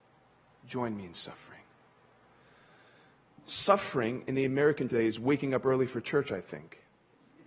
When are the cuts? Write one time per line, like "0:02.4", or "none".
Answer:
0:04.9